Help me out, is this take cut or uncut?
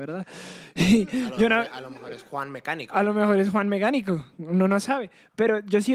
uncut